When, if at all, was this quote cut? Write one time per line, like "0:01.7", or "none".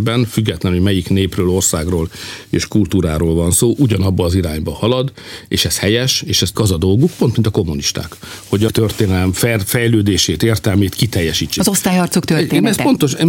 0:06.5
0:08.7